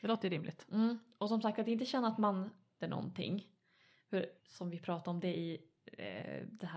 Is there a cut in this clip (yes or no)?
yes